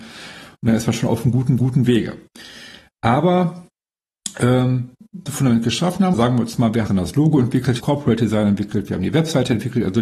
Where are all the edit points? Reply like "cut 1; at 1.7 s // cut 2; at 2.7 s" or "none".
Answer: cut 1; at 1.6 s // cut 2; at 5.3 s // cut 3; at 6.1 s // cut 4; at 6.9 s // cut 5; at 7.8 s